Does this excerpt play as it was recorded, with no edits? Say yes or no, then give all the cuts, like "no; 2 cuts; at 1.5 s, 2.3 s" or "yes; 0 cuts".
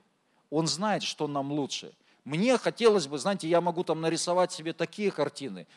yes; 0 cuts